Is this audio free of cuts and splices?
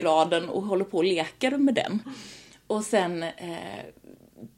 yes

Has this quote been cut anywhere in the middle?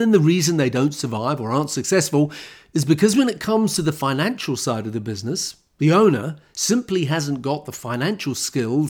no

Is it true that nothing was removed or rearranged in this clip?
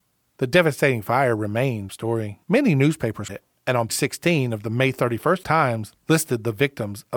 no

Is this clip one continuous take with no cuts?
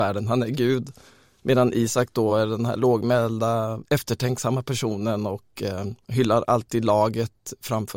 yes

